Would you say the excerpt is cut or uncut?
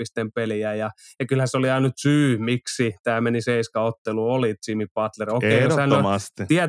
uncut